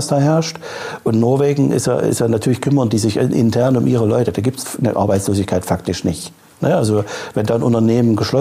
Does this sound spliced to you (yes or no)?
no